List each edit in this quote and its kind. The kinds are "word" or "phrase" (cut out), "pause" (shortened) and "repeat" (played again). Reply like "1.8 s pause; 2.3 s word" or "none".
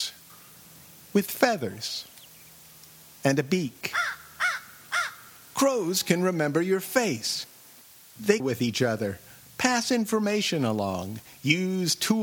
8.4 s word

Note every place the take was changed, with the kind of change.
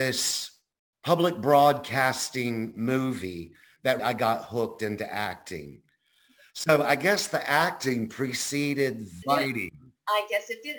4.0 s word; 9.2 s word

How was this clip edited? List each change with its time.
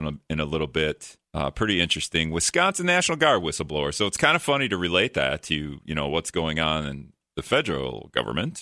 1.2 s pause

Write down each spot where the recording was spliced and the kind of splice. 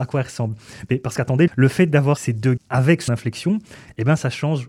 1.5 s word; 2.2 s word; 2.6 s word; 3.1 s word

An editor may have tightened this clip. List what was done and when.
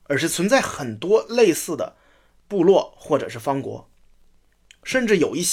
none

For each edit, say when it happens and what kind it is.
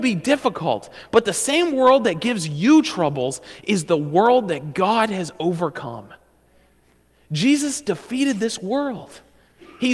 none

